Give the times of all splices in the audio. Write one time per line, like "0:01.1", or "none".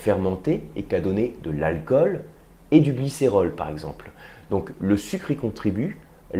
0:04.7